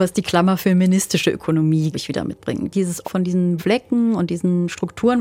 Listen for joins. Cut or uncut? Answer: cut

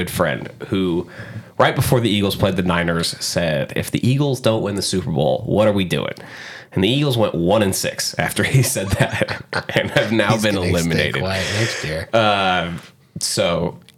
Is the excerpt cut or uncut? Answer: uncut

